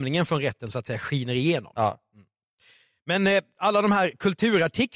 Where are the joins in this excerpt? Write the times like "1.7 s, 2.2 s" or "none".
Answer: none